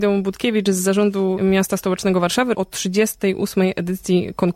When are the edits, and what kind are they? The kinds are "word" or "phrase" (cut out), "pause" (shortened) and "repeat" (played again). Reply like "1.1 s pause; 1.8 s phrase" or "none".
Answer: 1.4 s word; 2.5 s word